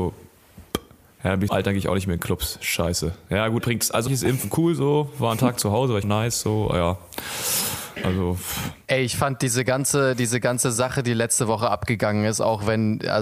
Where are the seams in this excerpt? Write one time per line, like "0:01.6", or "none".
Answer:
0:01.5
0:03.6
0:04.1
0:06.0

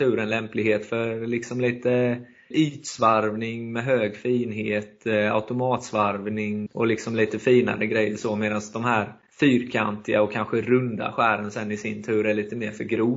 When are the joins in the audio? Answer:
0:06.7

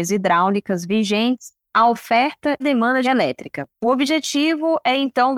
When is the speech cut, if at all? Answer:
0:01.6
0:02.6
0:03.0
0:03.7

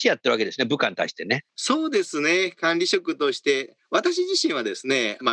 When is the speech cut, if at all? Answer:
0:01.5

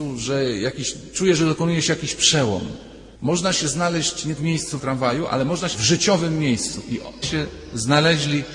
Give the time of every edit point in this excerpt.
0:03.1
0:04.4
0:04.8
0:05.7
0:07.2

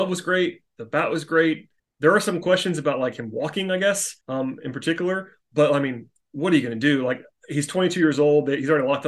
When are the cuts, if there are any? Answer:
0:01.8
0:04.2

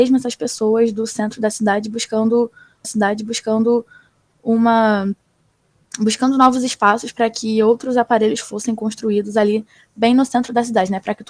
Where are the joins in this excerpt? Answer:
0:02.8

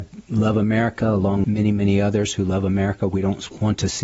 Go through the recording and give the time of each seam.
0:01.4

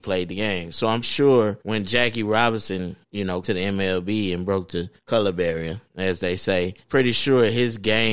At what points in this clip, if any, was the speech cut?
0:01.0
0:01.6
0:03.0
0:03.4
0:05.0
0:05.9
0:06.8

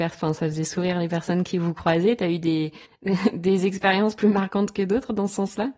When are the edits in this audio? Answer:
0:02.8

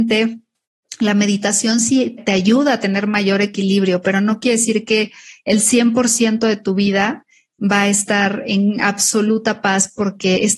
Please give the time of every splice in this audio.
0:02.2

